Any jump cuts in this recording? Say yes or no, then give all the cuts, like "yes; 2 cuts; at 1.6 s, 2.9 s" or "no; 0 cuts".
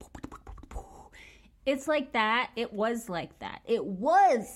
no; 0 cuts